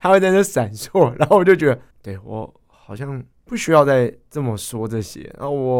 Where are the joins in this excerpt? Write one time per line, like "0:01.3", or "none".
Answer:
0:01.9
0:03.3